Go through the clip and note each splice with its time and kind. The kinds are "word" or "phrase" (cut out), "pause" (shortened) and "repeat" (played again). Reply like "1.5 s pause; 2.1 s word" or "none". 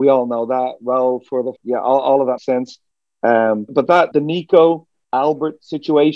1.6 s word; 2.4 s word; 3.7 s word; 4.1 s word